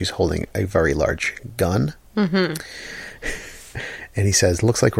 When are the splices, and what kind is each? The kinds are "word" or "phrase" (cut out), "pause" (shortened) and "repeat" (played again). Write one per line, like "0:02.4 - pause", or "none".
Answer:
none